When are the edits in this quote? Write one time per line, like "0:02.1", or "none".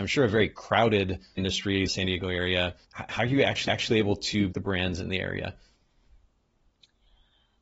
0:01.4
0:01.9
0:02.8
0:03.7
0:04.5